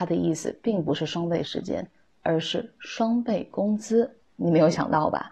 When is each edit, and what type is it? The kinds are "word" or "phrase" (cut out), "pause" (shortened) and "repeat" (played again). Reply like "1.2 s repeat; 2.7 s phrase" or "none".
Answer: none

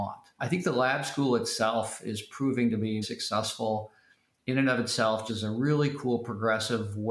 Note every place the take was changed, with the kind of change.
3.0 s word; 5.3 s word

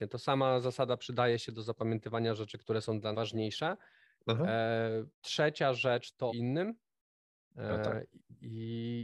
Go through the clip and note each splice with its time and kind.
3.1 s word; 5.1 s pause; 6.3 s word

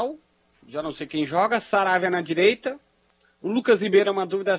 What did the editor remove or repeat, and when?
none

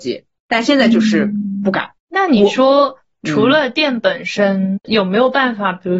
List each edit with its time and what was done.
2.0 s pause; 4.8 s word

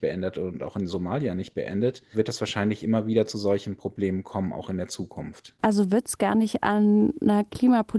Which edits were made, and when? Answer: 2.1 s word

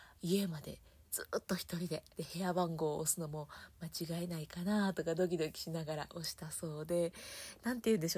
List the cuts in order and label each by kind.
2.1 s pause

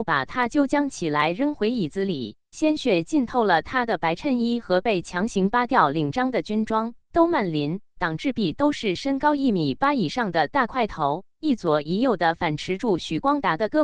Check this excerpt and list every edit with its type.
7.0 s pause

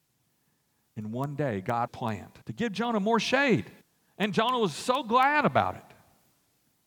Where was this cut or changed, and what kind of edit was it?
1.9 s phrase; 2.4 s pause; 3.8 s pause

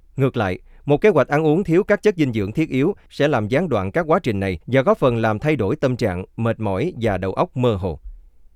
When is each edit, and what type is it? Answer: 4.6 s pause

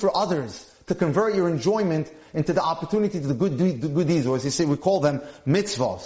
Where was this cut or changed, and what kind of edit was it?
none

